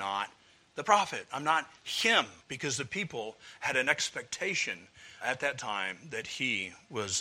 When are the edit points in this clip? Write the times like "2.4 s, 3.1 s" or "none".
2.4 s, 5.2 s